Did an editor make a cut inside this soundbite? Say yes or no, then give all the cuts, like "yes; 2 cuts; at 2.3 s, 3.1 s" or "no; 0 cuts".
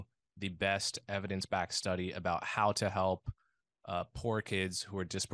no; 0 cuts